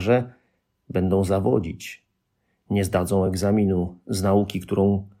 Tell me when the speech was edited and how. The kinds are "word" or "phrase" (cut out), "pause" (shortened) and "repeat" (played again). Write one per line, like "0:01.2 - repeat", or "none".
none